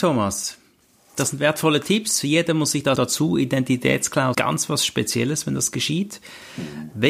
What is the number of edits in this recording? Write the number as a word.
two